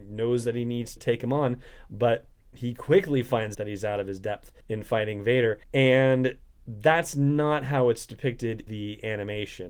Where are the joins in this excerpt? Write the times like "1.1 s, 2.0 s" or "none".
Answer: 1.0 s, 3.5 s, 4.6 s, 5.6 s, 8.7 s